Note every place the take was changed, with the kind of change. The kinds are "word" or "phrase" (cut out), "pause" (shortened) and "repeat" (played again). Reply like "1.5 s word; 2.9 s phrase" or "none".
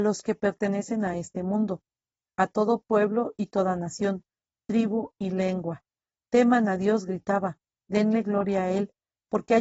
none